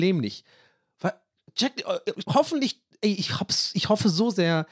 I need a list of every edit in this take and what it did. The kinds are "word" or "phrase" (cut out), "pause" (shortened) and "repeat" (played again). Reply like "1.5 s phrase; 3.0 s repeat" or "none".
2.2 s word

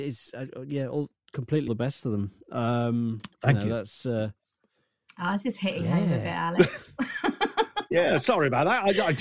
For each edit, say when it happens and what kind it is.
1.7 s word

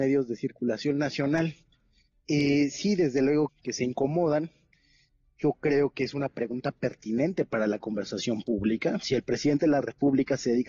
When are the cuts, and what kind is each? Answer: 3.5 s word

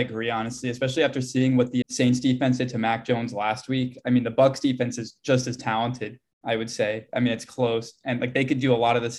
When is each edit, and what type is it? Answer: 1.8 s word

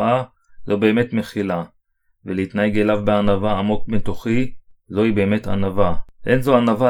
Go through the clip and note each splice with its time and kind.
none

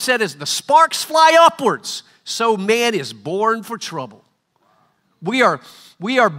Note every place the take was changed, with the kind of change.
none

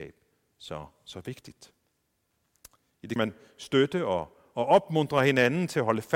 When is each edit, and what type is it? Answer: 3.2 s phrase

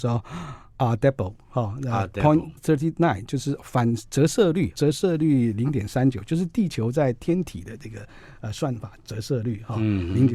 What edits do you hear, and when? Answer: 2.6 s word; 4.7 s phrase

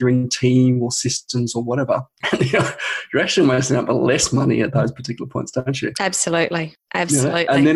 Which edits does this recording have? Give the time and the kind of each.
none

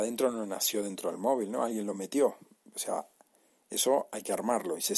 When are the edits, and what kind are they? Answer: none

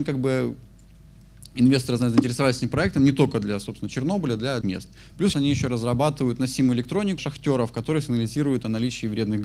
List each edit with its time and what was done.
4.6 s word; 5.3 s word; 7.2 s word

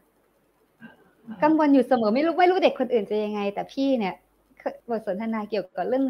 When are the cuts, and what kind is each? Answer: 4.8 s pause

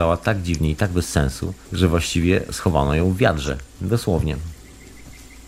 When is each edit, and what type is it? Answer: 1.6 s pause

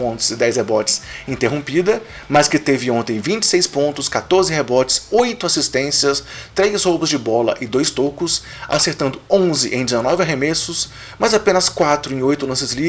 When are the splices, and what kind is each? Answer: none

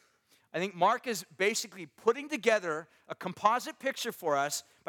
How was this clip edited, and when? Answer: none

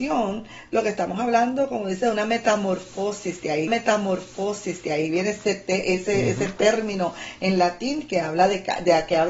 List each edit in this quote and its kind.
3.7 s repeat

